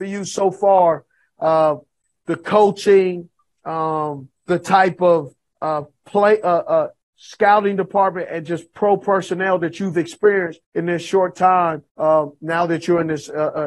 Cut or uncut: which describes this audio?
cut